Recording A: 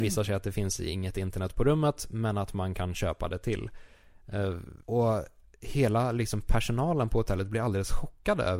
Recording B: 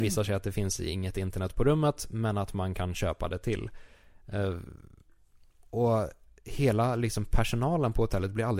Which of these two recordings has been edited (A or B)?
A